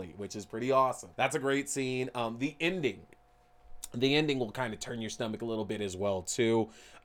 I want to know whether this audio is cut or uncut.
cut